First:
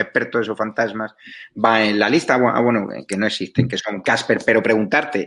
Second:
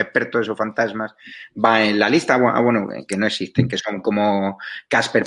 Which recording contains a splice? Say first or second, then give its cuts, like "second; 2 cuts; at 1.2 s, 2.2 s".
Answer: first; 1 cut; at 4.0 s